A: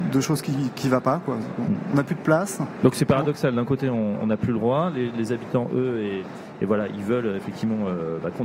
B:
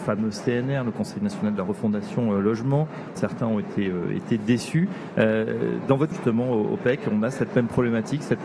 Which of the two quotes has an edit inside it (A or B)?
B